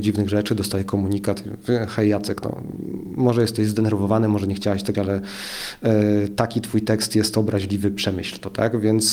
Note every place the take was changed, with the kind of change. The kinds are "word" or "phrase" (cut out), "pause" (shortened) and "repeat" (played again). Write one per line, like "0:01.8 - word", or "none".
0:04.9 - word